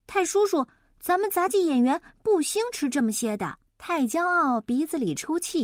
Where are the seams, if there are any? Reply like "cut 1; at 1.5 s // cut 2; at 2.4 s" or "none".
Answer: cut 1; at 3.7 s